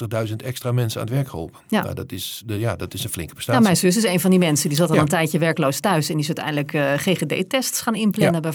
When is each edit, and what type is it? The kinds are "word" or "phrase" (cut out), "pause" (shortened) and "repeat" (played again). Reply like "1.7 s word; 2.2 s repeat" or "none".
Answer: none